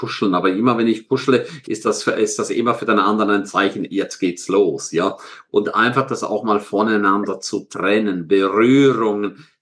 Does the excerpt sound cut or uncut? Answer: uncut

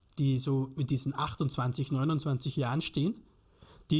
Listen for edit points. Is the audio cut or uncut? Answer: uncut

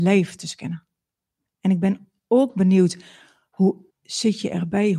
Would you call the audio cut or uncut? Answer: cut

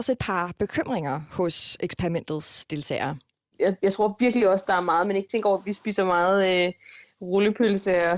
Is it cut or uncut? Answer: uncut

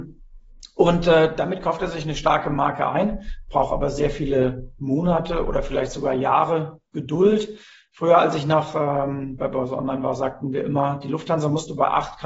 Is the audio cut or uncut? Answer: uncut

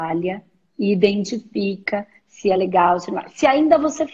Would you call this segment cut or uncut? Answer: uncut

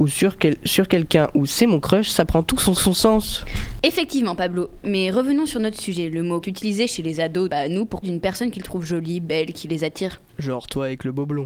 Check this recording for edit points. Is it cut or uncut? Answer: cut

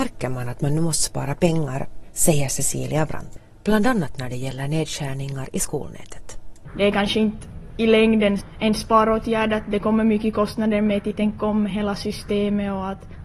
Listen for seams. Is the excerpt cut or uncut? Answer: uncut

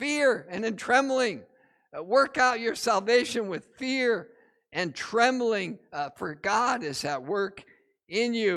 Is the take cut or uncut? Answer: uncut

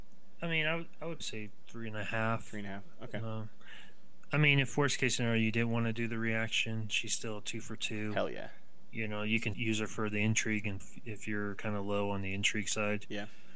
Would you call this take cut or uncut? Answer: cut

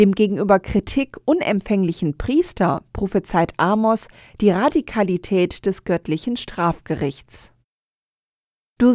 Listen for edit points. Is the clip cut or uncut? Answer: uncut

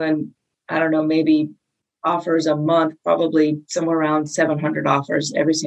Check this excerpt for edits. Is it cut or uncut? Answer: uncut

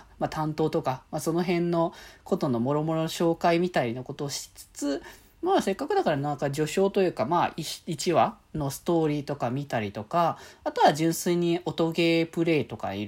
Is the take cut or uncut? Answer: uncut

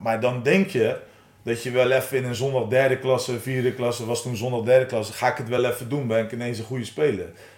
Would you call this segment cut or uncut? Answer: uncut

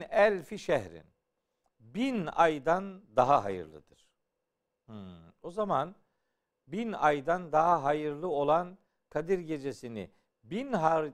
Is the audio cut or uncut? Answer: uncut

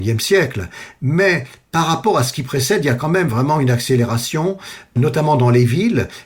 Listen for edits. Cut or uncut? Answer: uncut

